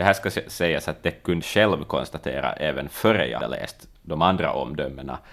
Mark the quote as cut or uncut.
cut